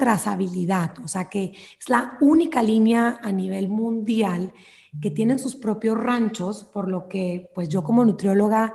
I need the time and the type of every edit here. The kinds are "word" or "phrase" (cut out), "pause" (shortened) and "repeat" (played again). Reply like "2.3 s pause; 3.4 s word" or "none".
none